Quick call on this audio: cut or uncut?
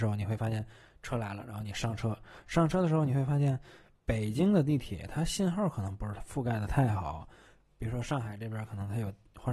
uncut